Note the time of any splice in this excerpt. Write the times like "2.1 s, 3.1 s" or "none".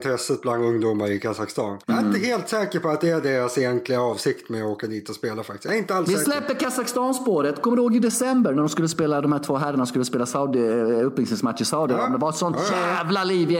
1.8 s

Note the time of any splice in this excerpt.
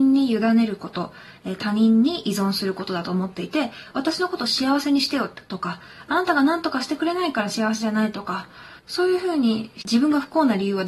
8.8 s

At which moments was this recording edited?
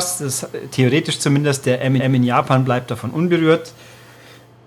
2.0 s

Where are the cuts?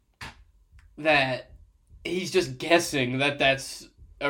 none

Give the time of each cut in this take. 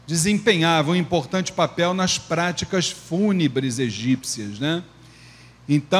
none

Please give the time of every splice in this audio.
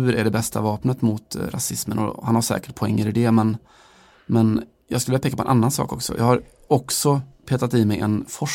none

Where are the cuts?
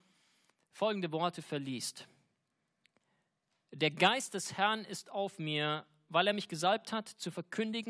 none

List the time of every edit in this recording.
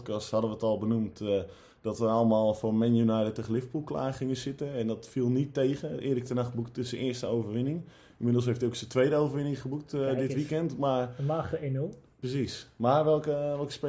none

